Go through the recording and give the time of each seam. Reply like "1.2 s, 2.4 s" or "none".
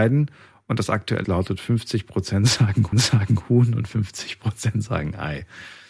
1.2 s, 2.9 s